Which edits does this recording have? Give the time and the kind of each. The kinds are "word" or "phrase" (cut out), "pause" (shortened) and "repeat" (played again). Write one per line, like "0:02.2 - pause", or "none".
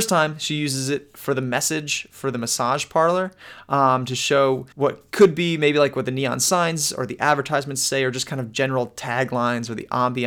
0:04.7 - pause